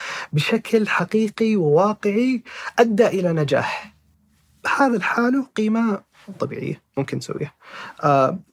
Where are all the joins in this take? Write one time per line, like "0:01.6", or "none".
0:06.4